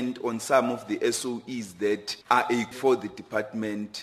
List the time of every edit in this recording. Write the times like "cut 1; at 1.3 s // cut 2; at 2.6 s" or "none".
cut 1; at 2.2 s // cut 2; at 2.7 s